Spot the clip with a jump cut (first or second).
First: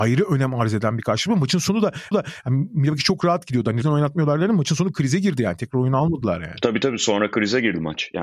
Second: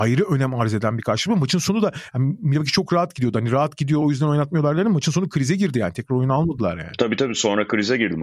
first